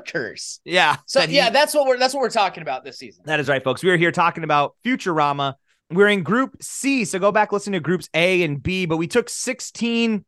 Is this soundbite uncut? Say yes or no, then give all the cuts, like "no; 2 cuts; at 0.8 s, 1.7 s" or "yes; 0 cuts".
yes; 0 cuts